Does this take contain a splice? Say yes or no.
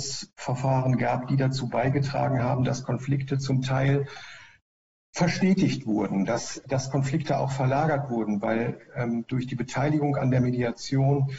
yes